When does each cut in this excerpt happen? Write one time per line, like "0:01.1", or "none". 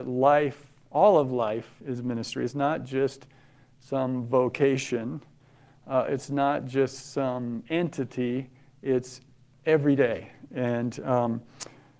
none

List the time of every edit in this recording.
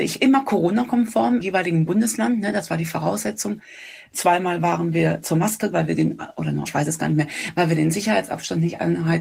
0:01.4
0:05.2
0:05.7
0:06.7

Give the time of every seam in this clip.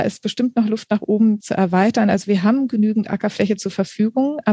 0:01.4

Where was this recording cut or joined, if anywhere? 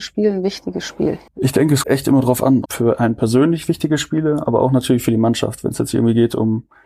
0:01.3
0:01.8
0:02.7

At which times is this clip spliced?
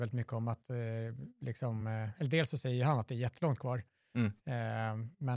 none

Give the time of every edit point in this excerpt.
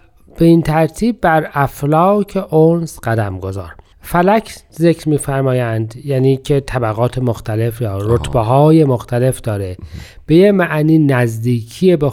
none

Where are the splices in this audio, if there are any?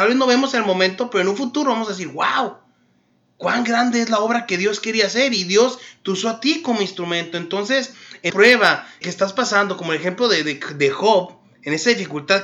0:08.3
0:09.0

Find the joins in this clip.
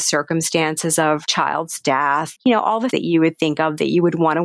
0:01.3
0:02.4
0:02.9

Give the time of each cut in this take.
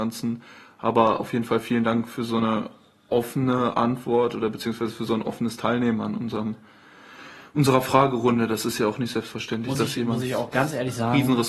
none

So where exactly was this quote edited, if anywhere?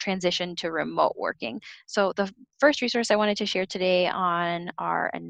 none

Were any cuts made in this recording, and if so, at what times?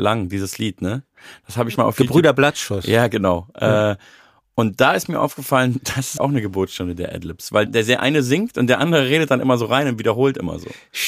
0:01.8
0:06.2
0:07.7

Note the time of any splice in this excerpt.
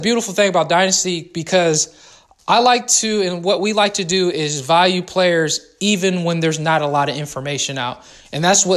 none

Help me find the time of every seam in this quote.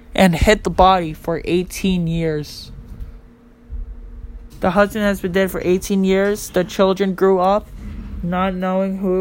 0:04.5

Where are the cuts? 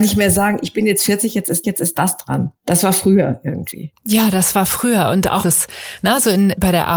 0:01.6
0:02.6
0:05.4

